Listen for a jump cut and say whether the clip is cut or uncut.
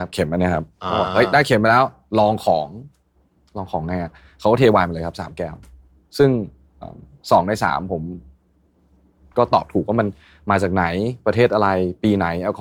uncut